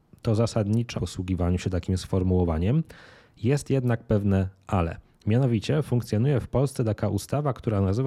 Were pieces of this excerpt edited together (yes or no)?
yes